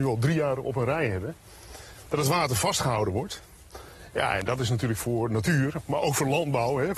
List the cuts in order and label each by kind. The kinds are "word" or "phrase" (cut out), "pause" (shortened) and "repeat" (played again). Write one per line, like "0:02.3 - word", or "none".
none